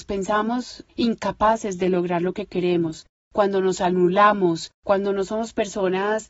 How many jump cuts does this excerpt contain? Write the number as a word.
zero